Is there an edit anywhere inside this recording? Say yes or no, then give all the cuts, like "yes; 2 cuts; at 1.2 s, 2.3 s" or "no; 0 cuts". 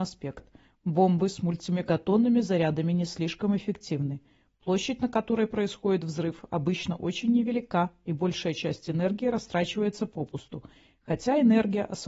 no; 0 cuts